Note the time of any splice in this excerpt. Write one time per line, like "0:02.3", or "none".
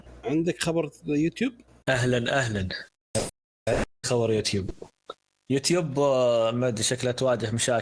0:04.0

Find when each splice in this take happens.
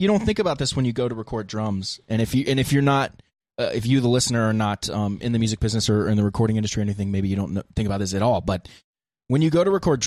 none

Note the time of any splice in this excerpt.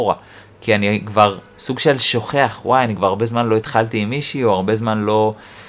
none

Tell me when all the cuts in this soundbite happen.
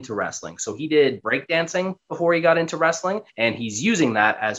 0:03.3

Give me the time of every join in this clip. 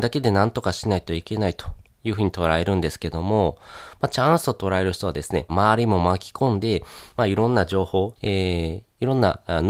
0:05.5
0:08.2

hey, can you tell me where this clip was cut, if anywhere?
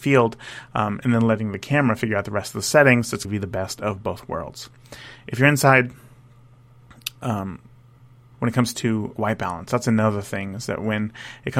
0:03.2
0:08.3
0:09.2

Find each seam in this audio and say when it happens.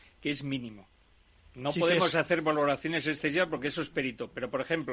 none

